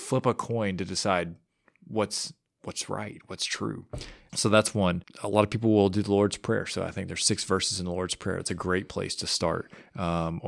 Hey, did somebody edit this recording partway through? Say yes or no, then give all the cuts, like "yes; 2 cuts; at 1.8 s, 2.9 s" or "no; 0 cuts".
no; 0 cuts